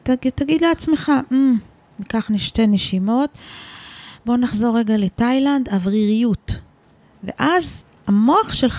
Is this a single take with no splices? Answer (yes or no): yes